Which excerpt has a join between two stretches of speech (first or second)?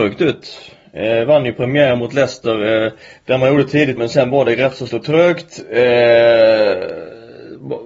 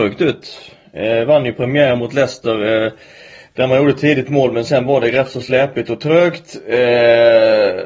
first